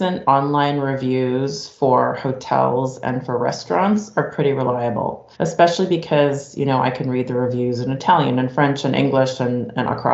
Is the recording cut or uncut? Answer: cut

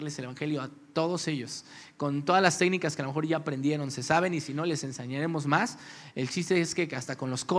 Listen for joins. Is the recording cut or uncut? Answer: uncut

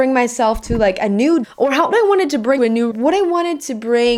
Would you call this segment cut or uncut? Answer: cut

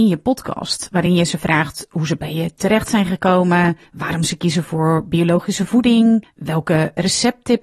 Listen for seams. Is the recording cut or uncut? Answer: uncut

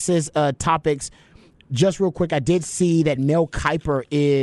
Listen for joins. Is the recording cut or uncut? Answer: uncut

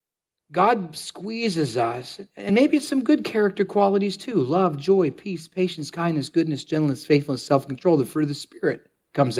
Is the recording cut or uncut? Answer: uncut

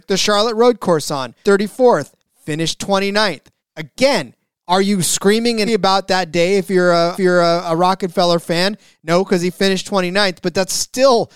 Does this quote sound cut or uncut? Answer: cut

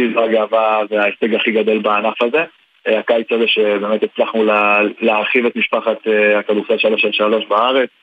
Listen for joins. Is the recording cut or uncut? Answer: uncut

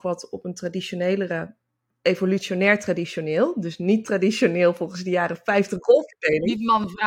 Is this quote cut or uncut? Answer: uncut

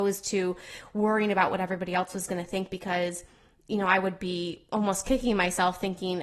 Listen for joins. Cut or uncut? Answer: uncut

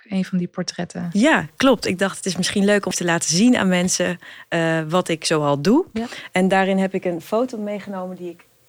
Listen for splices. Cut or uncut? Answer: cut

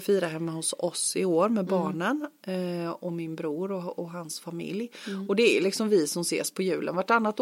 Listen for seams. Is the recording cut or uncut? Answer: uncut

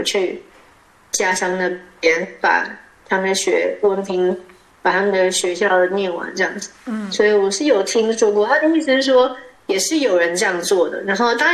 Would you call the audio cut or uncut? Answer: uncut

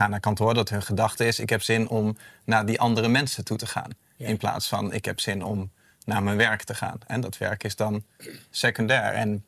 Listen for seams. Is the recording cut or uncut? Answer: uncut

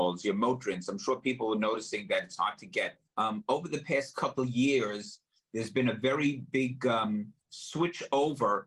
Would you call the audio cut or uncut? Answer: cut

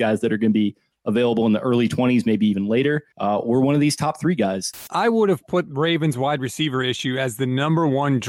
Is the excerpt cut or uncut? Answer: cut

